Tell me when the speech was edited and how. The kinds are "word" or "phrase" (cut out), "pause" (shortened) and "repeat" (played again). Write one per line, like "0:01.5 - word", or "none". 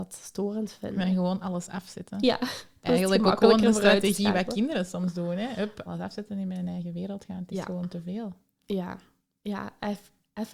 0:05.9 - word